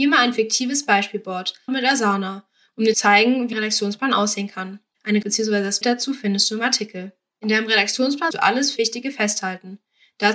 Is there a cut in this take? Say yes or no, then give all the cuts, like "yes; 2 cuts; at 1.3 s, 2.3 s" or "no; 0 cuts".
yes; 7 cuts; at 1.7 s, 2.9 s, 3.5 s, 5.2 s, 5.8 s, 8.3 s, 8.8 s